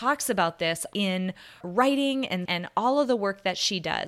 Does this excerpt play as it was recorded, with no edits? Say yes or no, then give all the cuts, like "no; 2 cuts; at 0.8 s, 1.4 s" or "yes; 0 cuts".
no; 3 cuts; at 0.9 s, 1.6 s, 2.4 s